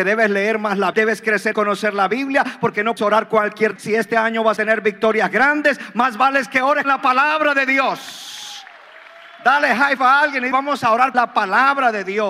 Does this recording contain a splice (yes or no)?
yes